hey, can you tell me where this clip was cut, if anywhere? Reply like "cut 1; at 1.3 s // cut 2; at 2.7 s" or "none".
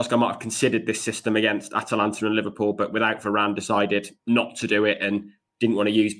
cut 1; at 4.2 s